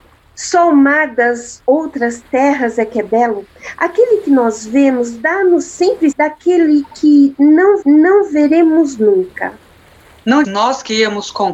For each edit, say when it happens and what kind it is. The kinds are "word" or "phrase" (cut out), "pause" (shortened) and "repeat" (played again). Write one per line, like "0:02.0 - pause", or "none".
0:06.1 - word
0:07.8 - repeat
0:10.4 - word